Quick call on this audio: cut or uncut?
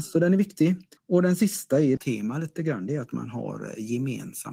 cut